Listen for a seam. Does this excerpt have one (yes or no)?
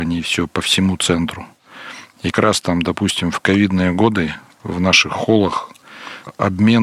yes